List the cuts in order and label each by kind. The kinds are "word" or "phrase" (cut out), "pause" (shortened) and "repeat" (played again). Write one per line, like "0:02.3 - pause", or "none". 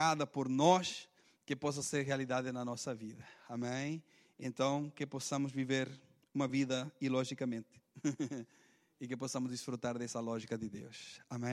none